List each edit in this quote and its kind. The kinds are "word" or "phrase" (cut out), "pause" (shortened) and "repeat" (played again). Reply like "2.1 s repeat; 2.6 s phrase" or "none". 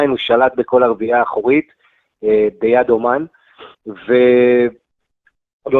3.7 s pause